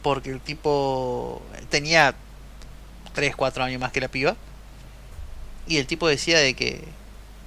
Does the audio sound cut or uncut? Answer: cut